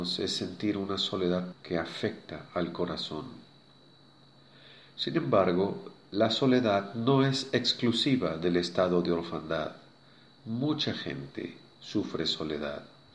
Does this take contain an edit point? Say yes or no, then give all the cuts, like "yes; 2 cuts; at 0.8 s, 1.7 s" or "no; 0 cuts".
yes; 1 cut; at 1.5 s